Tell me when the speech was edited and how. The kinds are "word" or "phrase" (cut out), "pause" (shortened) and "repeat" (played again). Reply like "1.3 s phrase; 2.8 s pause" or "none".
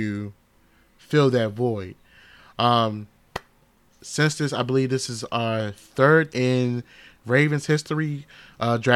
6.3 s word